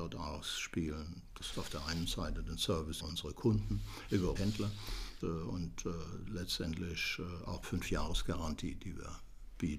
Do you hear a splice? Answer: yes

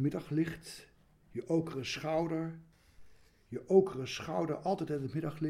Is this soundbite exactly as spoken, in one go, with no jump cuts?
yes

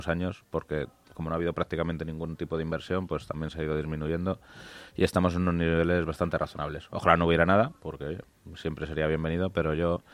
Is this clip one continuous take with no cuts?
yes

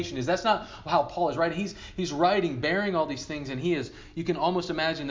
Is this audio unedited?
yes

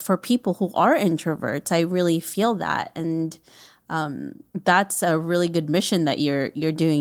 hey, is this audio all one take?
yes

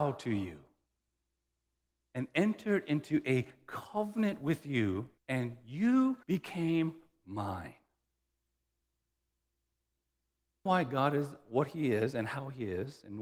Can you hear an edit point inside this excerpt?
yes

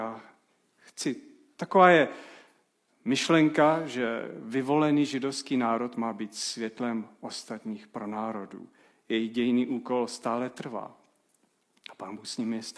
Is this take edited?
no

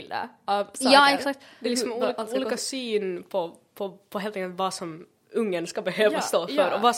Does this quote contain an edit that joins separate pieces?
no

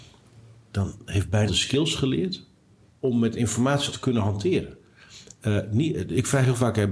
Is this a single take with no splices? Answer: no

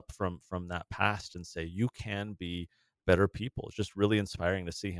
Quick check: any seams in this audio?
no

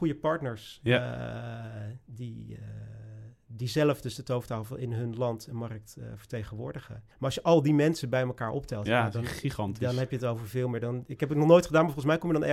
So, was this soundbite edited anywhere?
yes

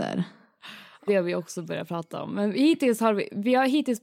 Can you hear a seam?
yes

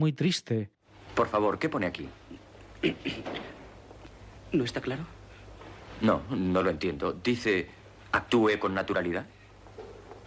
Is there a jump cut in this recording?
no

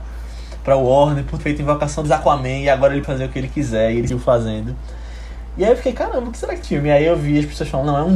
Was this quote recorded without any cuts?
no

